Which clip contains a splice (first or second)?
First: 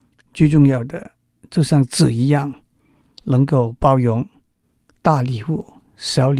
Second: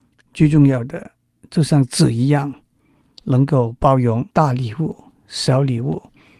second